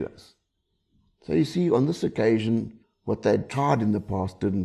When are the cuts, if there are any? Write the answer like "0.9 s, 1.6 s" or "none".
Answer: 2.8 s